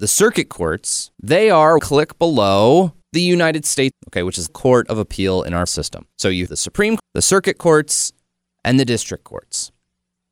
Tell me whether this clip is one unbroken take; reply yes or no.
no